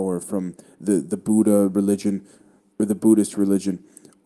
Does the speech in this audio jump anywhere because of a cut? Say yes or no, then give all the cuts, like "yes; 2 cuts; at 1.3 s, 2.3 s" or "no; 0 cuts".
no; 0 cuts